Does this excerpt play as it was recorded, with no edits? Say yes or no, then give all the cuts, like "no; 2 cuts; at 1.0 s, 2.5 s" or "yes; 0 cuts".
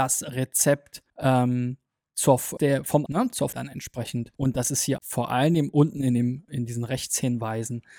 no; 7 cuts; at 1.1 s, 2.6 s, 3.1 s, 3.5 s, 4.3 s, 5.0 s, 6.5 s